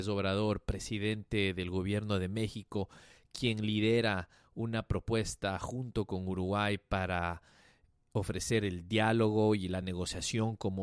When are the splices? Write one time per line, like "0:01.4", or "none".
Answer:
none